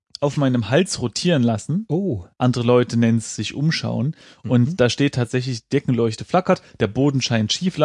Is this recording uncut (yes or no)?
yes